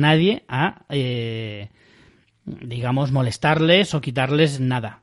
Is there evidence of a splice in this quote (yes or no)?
no